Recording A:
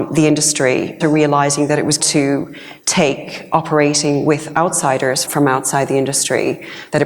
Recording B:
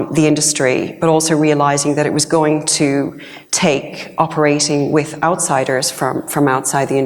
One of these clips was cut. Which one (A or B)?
A